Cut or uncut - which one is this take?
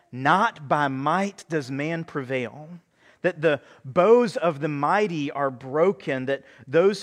uncut